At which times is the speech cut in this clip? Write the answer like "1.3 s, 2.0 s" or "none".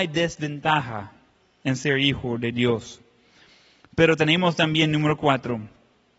none